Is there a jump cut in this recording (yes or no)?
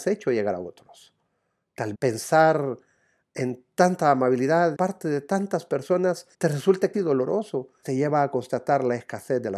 yes